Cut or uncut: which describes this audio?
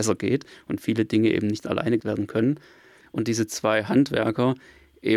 cut